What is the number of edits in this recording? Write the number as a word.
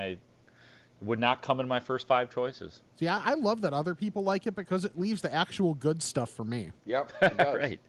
two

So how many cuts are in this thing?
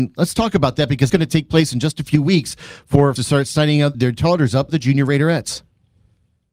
four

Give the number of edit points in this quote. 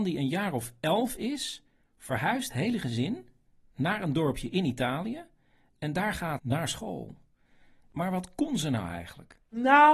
two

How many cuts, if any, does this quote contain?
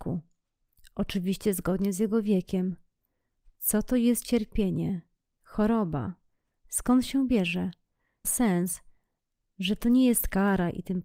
one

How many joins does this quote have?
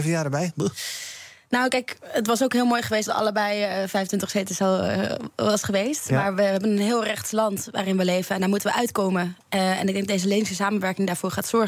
one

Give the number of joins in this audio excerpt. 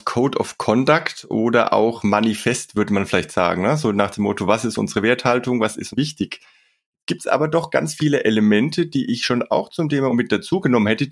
two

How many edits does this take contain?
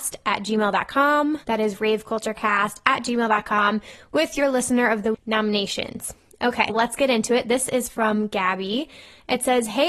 three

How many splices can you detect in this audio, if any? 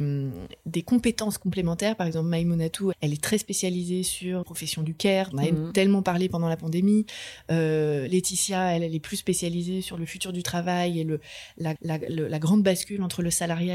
four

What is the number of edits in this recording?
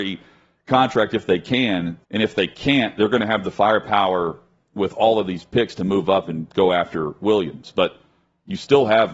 one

